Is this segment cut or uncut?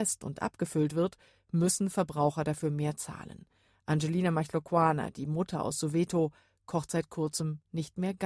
uncut